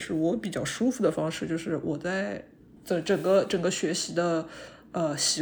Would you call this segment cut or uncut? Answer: uncut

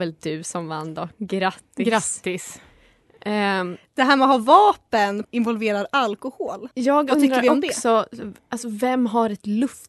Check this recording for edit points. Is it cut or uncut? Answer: cut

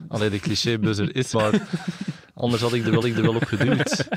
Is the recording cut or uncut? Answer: cut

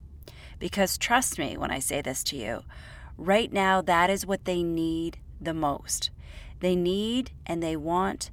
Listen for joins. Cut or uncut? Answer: uncut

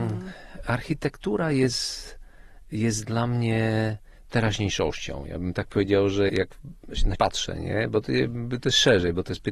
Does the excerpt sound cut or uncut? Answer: cut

